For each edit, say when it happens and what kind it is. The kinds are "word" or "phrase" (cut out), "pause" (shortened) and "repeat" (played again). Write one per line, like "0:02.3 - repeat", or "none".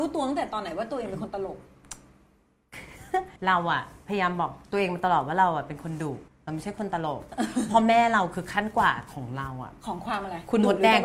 0:03.4 - pause
0:04.6 - pause
0:06.3 - pause